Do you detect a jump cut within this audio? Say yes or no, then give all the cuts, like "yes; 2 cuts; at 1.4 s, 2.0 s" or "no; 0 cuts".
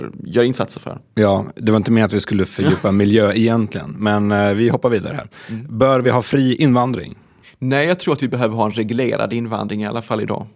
no; 0 cuts